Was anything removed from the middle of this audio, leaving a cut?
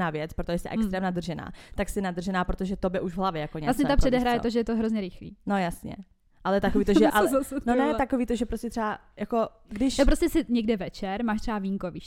yes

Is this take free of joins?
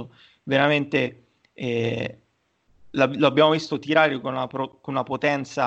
yes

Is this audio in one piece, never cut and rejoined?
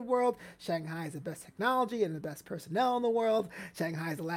yes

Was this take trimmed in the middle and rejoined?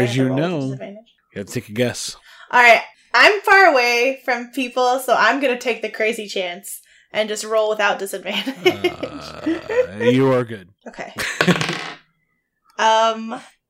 no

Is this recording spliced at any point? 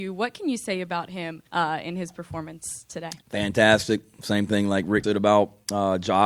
yes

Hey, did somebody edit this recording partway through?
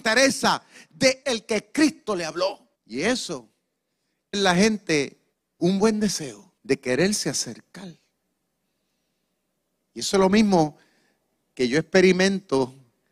yes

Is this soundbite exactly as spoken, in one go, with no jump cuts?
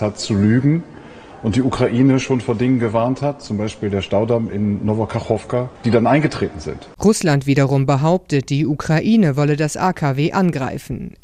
no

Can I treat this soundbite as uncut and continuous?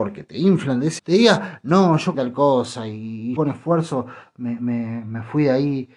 no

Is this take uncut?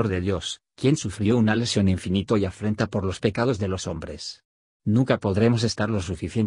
yes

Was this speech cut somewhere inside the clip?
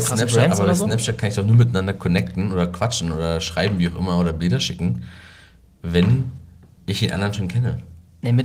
no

